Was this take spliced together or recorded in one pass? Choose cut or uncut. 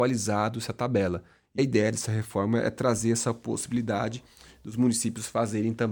cut